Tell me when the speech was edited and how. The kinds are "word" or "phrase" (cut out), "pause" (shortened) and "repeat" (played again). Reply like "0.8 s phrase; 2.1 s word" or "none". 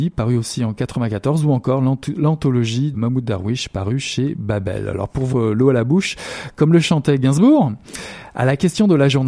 2.9 s word; 5.3 s word